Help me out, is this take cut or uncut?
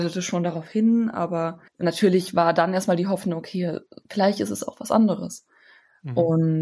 cut